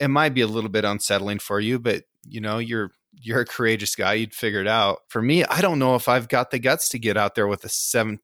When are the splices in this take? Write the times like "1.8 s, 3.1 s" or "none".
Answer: 5.0 s